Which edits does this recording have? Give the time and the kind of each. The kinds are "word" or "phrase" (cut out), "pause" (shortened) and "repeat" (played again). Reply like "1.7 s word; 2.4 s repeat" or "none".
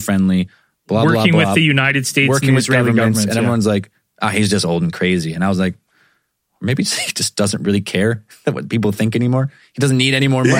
none